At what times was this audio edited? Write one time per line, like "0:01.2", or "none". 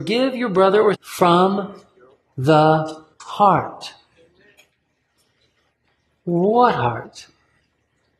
0:00.9
0:03.1